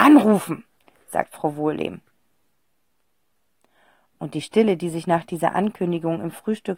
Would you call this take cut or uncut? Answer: uncut